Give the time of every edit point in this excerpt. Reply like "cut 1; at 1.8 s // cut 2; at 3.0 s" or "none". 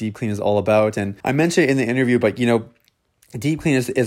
cut 1; at 1.2 s